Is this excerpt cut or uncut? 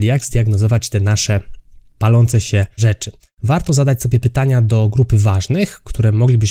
uncut